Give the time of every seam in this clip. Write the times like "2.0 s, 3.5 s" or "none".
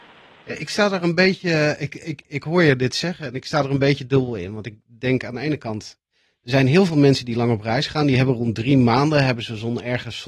none